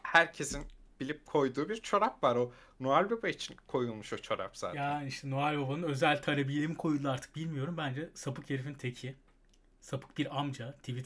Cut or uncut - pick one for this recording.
uncut